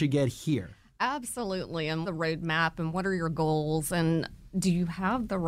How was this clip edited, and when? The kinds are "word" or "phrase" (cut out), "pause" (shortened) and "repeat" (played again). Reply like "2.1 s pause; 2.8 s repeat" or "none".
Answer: 2.0 s word